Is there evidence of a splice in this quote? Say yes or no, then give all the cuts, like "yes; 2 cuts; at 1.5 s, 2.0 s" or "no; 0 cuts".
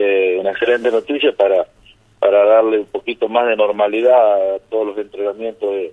no; 0 cuts